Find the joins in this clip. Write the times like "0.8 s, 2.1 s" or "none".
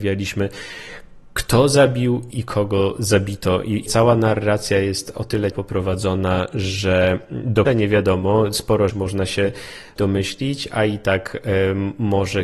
2.3 s, 3.9 s, 5.5 s, 7.7 s, 8.9 s, 10.0 s